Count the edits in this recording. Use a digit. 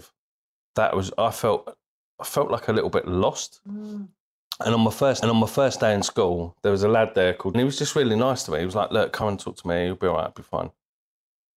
3